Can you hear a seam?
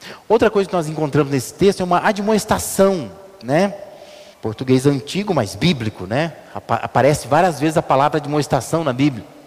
yes; 1 cut; at 4.3 s

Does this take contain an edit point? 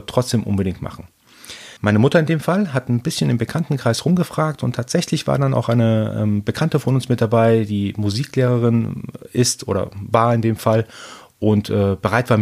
yes; 1 cut; at 1.8 s

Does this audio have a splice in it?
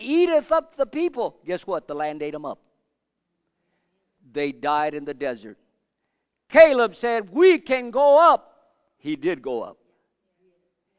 no; 0 cuts

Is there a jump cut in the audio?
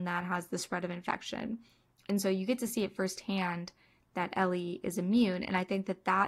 no; 0 cuts

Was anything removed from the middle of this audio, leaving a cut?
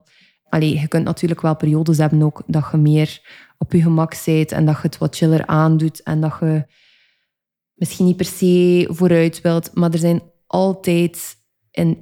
no; 0 cuts

